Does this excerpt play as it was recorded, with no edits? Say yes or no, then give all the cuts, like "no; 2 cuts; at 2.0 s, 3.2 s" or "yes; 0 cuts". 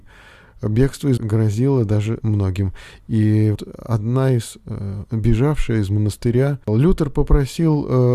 no; 4 cuts; at 1.2 s, 2.2 s, 3.5 s, 5.1 s